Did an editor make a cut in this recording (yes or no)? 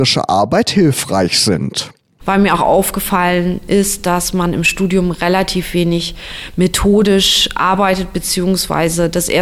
no